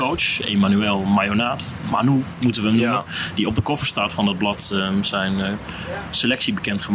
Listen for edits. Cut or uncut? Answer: uncut